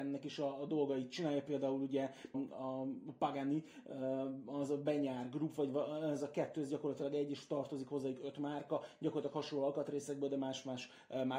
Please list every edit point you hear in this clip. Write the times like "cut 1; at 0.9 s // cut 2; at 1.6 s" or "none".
cut 1; at 2.3 s